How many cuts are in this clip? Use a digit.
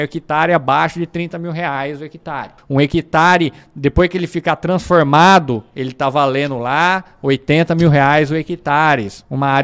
1